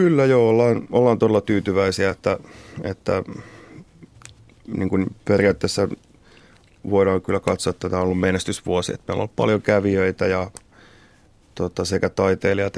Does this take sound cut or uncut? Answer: uncut